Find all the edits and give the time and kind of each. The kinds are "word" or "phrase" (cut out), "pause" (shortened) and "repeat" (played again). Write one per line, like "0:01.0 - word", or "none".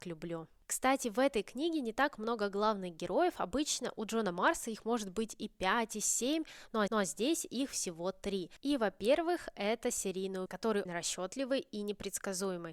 0:06.9 - repeat
0:10.5 - word
0:10.9 - word